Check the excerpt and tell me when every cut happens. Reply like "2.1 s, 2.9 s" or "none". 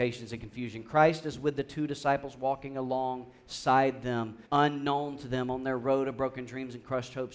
4.5 s